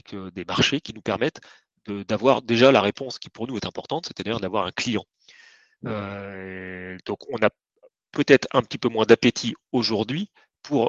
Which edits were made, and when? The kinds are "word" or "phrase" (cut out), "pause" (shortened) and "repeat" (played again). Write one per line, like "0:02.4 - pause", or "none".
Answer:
none